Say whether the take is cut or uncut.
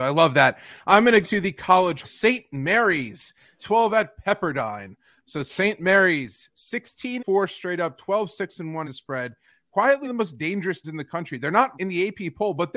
cut